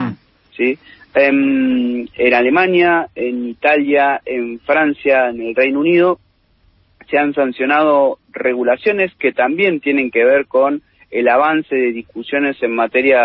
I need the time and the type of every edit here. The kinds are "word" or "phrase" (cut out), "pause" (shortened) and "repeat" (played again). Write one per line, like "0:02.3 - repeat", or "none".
none